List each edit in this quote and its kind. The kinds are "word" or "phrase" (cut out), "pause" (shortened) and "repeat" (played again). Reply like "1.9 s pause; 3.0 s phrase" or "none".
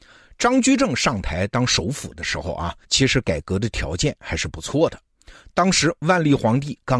2.8 s pause